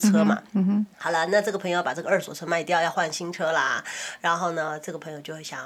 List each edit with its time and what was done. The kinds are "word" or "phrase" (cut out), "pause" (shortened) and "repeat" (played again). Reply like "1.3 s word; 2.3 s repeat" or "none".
0.9 s pause

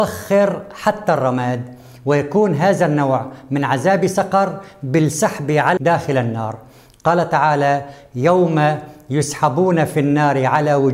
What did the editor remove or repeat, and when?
5.8 s word

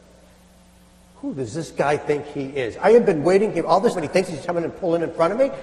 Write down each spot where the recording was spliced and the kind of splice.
3.9 s word; 4.4 s phrase

